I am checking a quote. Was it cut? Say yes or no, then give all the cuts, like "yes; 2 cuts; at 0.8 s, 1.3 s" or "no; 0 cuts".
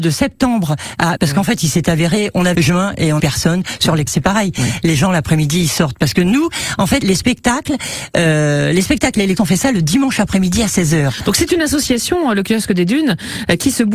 yes; 6 cuts; at 1.2 s, 2.5 s, 3.2 s, 4.1 s, 7.0 s, 9.4 s